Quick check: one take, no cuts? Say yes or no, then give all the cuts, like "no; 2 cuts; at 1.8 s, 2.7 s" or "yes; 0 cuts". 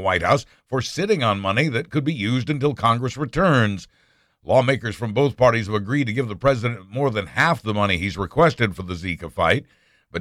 yes; 0 cuts